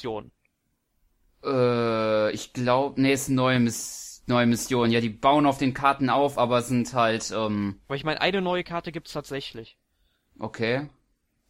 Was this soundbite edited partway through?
no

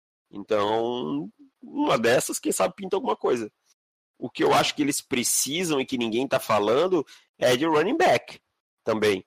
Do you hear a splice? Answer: no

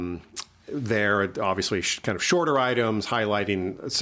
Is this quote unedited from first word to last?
yes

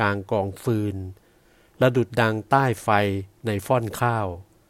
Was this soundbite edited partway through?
no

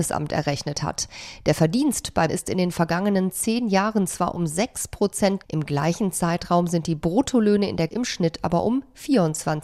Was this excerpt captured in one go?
no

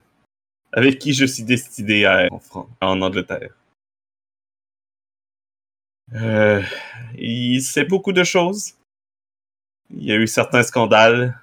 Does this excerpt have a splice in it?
yes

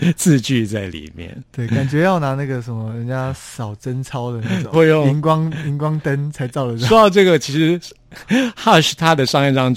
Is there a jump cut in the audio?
yes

